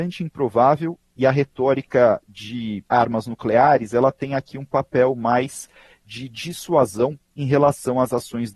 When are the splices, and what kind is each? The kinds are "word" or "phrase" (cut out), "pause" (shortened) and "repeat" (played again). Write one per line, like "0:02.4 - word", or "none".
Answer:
0:02.9 - pause